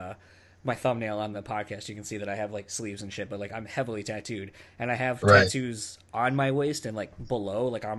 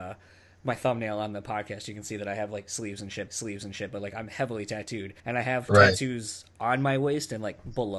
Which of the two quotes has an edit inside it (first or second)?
second